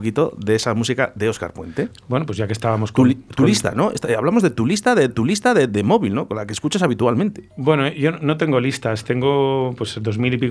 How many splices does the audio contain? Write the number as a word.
one